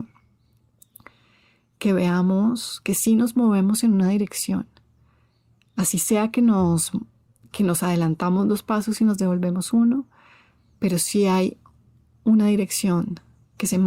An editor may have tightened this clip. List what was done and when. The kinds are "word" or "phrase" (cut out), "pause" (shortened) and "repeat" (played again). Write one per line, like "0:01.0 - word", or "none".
none